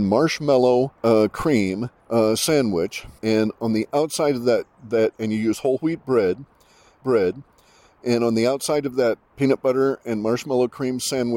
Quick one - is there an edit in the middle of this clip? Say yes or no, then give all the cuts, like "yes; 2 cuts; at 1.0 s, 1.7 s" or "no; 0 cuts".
yes; 4 cuts; at 1.0 s, 2.0 s, 3.2 s, 7.0 s